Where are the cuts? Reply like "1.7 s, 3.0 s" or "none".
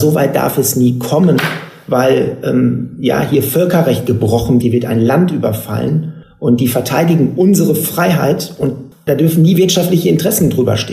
4.6 s